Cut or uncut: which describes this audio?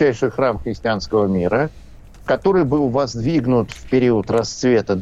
uncut